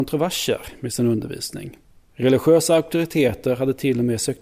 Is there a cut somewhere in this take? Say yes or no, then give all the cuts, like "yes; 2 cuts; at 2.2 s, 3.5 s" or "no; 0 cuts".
yes; 1 cut; at 1.9 s